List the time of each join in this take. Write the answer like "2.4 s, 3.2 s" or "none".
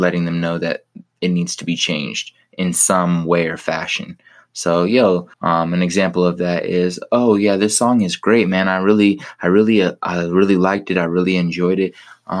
5.3 s